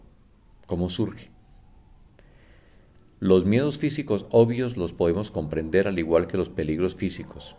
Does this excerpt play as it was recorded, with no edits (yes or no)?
yes